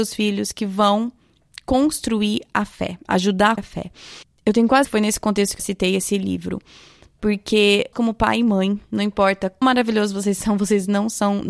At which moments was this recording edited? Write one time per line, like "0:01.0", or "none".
0:03.6
0:04.8
0:05.6
0:07.9
0:09.6

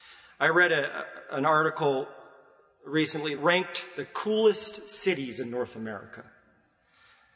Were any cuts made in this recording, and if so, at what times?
0:03.4

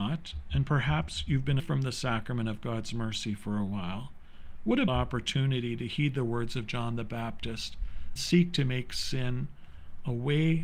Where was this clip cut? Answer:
0:01.6
0:04.9
0:08.2

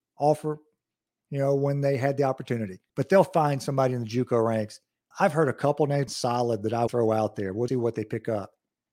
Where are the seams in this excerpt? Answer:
0:02.9
0:05.1
0:06.1
0:06.9
0:07.7

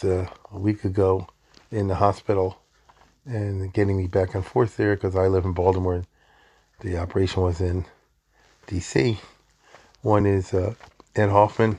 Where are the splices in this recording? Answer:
none

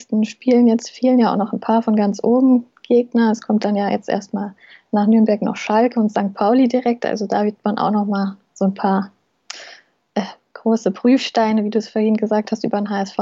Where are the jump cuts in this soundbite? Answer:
none

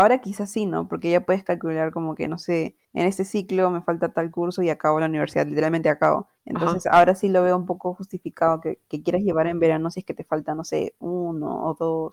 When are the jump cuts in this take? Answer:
0:02.8
0:06.4

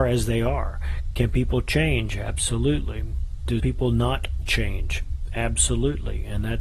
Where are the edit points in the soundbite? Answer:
0:03.6
0:04.4

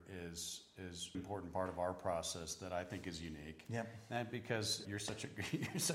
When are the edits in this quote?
0:01.1
0:04.8

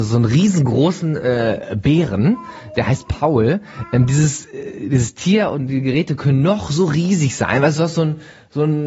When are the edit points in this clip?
none

